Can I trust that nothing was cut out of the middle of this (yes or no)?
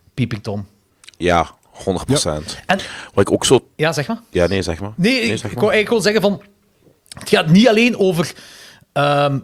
yes